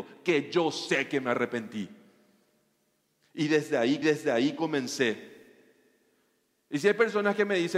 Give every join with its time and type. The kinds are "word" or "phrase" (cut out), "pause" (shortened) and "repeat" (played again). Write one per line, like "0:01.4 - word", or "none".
0:04.0 - repeat